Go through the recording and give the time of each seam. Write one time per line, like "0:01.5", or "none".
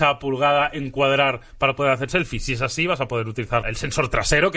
0:02.1
0:03.6